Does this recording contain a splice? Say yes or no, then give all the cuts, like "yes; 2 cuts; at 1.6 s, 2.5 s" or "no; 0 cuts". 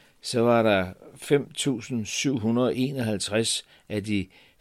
no; 0 cuts